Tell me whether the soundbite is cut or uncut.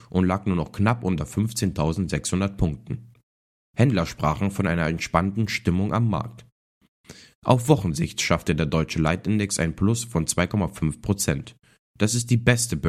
uncut